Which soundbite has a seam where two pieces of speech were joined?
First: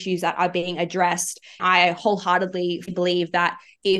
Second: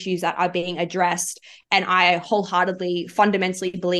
first; 2 cuts; at 1.6 s, 2.9 s

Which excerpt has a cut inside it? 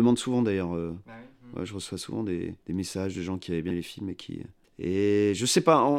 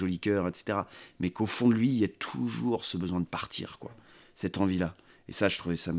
first; 3 cuts; at 2.6 s, 3.7 s, 4.6 s

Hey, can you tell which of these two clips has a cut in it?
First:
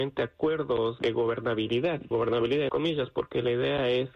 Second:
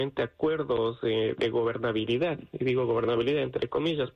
first; 3 cuts; at 1.0 s, 2.1 s, 2.7 s

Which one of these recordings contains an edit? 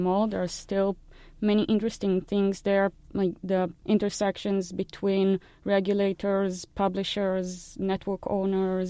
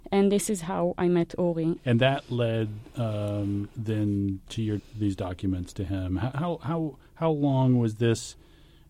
second; 2 cuts; at 4.8 s, 6.3 s

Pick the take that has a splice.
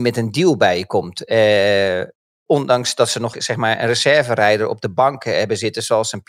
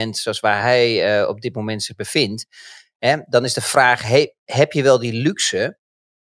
first; 1 cut; at 3.3 s

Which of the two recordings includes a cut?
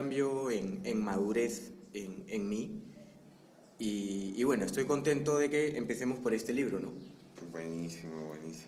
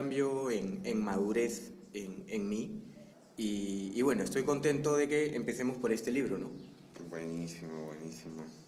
second; 1 cut; at 3.1 s

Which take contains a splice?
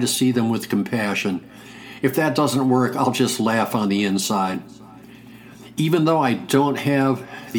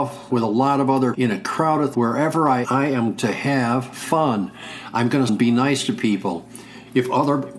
second; 5 cuts; at 1.1 s, 1.9 s, 2.6 s, 3.2 s, 5.3 s

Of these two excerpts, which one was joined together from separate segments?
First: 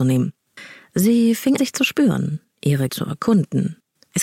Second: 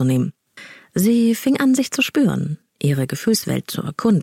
first; 2 cuts; at 1.6 s, 2.9 s

